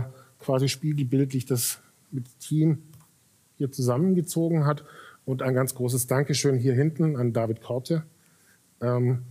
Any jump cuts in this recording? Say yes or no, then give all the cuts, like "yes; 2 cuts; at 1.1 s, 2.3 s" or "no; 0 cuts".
no; 0 cuts